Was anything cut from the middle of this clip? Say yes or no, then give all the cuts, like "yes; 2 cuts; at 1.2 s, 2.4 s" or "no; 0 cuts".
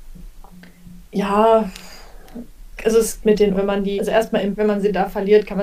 yes; 5 cuts; at 2.8 s, 3.2 s, 3.5 s, 4.0 s, 4.5 s